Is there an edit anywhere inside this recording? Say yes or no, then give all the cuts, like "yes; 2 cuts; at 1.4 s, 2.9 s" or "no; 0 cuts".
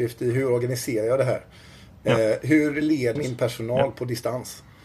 yes; 1 cut; at 3.2 s